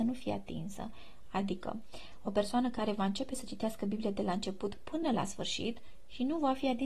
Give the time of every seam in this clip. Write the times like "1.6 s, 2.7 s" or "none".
none